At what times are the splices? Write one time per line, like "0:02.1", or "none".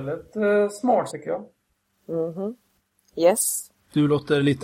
0:01.1